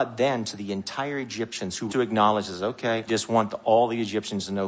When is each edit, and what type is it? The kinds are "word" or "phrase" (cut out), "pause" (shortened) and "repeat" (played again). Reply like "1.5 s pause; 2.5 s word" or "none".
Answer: 1.9 s word; 3.1 s word